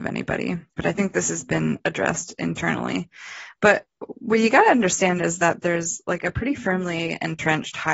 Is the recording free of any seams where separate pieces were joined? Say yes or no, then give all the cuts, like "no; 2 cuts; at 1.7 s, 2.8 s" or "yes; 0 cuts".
yes; 0 cuts